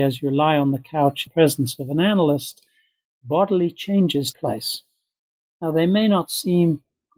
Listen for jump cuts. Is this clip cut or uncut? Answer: cut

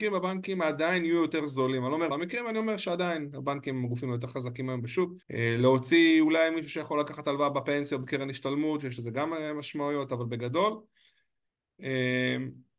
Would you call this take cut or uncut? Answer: cut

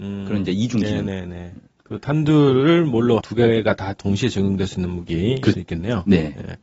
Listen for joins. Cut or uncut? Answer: cut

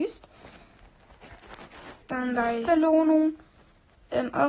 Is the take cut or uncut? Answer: cut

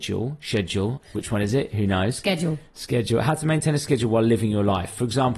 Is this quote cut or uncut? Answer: uncut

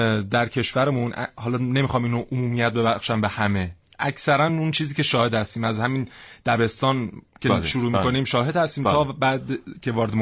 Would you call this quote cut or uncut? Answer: uncut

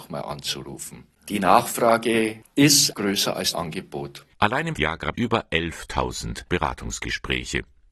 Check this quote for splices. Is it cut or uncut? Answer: cut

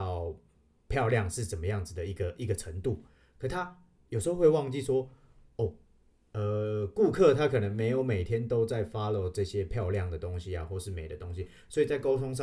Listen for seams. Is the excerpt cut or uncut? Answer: uncut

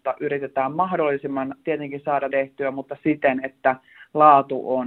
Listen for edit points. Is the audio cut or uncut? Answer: cut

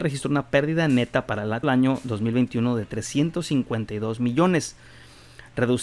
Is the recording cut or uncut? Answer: cut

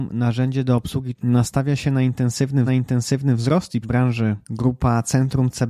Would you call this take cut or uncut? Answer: cut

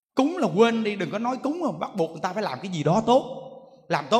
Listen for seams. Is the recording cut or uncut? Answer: uncut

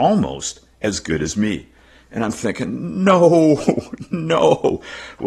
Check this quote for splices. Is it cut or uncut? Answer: uncut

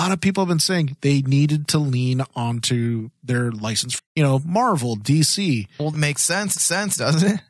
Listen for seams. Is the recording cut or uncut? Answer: cut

